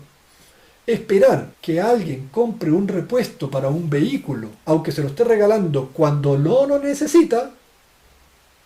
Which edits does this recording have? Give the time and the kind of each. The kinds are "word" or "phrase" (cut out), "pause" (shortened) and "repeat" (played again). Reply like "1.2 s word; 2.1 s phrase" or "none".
1.5 s pause; 4.6 s pause